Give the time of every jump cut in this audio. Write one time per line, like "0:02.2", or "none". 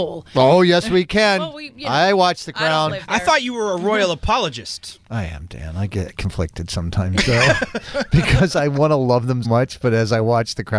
0:05.0
0:09.4